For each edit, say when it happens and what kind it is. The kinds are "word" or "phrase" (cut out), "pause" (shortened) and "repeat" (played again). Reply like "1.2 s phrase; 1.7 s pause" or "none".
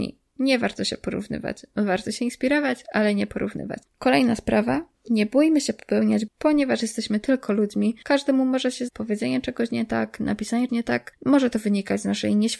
3.9 s pause; 6.3 s word; 8.9 s word; 10.7 s word